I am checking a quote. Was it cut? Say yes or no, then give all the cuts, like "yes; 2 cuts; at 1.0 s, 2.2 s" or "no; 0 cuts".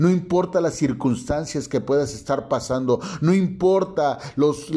no; 0 cuts